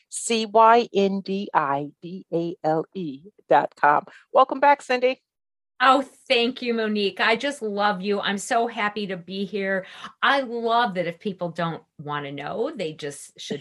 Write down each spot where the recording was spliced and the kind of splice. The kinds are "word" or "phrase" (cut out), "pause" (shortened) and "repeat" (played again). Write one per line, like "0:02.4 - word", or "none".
none